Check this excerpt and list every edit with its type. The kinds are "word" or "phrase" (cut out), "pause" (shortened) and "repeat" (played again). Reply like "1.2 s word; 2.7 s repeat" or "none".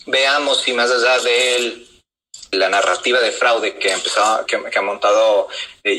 2.5 s word; 4.5 s word